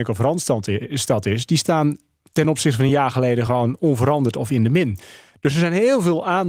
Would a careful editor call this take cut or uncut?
uncut